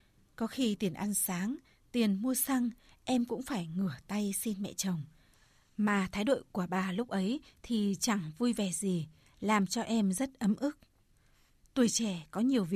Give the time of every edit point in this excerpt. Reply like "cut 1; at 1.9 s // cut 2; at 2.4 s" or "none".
none